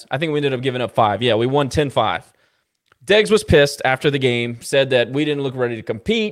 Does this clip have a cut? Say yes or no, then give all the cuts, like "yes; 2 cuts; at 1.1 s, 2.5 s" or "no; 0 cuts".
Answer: no; 0 cuts